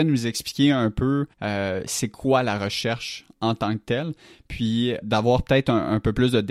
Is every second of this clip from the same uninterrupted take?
no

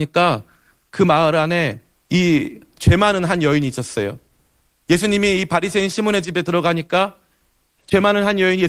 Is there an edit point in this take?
yes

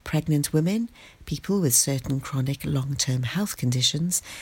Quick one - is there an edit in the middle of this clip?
no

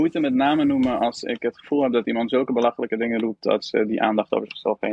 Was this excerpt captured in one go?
yes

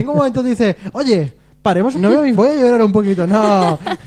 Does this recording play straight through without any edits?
no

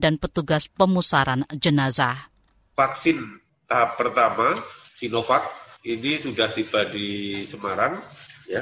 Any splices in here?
no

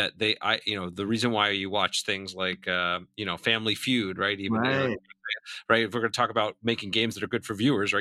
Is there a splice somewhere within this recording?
no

